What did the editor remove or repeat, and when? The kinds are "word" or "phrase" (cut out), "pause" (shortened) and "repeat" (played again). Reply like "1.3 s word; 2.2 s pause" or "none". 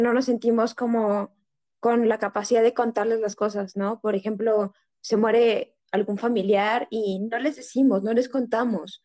none

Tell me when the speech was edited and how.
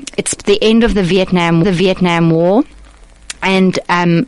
1.6 s repeat

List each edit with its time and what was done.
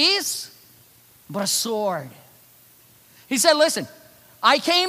none

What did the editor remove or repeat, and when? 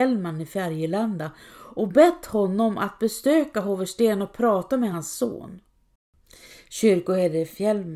none

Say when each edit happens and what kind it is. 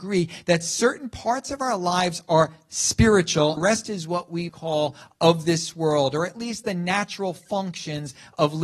3.6 s phrase; 4.5 s word

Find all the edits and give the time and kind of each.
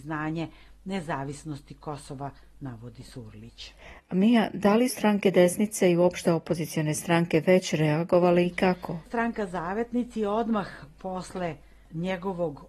4.9 s word

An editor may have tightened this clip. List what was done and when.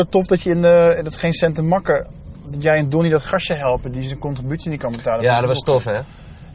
none

